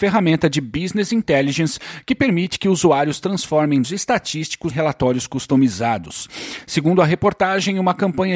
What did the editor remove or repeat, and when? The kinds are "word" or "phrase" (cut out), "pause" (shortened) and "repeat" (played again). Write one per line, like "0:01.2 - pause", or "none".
0:03.8 - word
0:04.7 - word